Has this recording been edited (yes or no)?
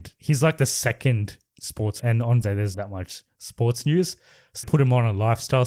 yes